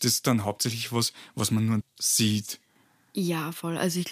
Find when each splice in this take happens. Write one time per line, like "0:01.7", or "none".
0:01.8